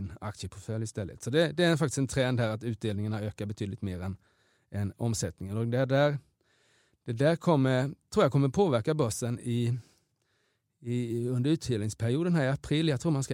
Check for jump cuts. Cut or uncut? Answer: uncut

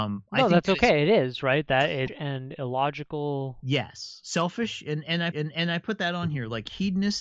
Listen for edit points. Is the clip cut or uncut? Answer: cut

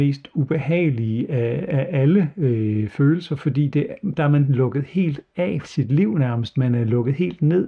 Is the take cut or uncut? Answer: cut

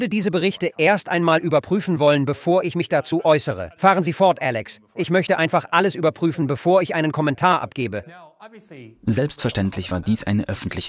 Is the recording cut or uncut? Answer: uncut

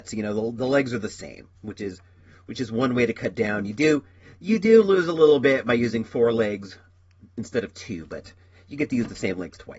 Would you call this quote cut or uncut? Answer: cut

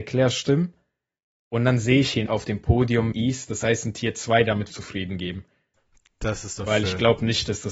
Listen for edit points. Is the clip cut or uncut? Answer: cut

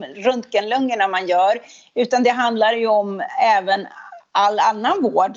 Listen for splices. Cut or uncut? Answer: uncut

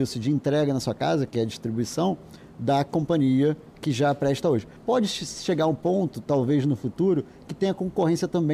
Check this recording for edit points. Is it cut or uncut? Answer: cut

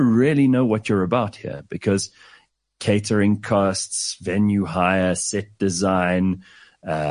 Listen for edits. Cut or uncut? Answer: uncut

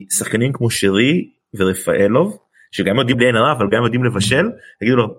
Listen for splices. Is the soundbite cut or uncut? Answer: cut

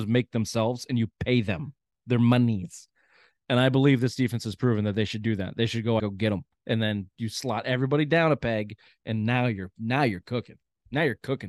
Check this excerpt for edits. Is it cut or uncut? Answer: cut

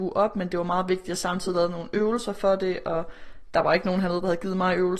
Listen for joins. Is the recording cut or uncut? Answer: uncut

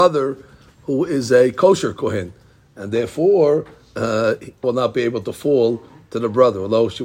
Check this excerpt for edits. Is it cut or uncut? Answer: cut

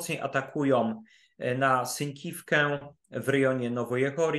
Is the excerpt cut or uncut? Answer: uncut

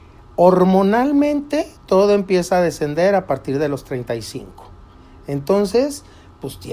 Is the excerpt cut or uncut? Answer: cut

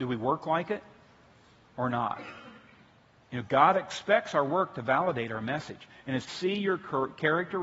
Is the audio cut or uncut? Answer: cut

